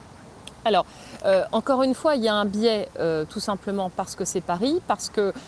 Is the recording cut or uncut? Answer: uncut